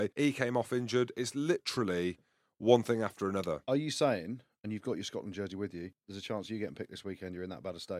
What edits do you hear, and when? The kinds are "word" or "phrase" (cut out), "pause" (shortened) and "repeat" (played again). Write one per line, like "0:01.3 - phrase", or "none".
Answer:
none